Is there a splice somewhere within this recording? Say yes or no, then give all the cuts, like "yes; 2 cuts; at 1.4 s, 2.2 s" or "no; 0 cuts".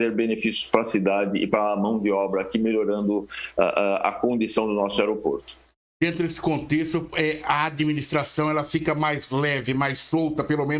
no; 0 cuts